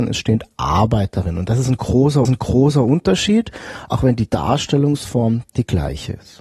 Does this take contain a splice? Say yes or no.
yes